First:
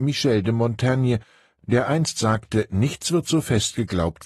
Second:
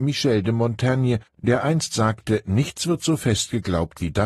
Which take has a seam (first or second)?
second